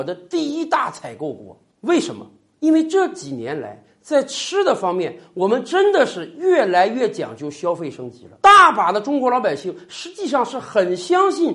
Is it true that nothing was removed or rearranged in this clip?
yes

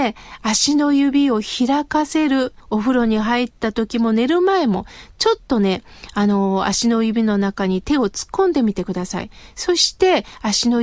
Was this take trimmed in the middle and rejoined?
yes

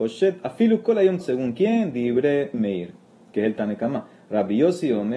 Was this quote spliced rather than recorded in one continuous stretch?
yes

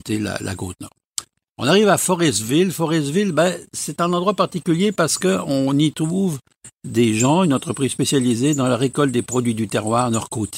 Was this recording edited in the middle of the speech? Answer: no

